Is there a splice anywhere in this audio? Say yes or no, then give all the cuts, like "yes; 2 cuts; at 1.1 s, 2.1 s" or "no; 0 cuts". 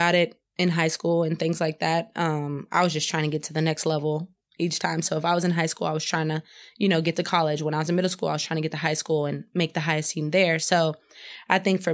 no; 0 cuts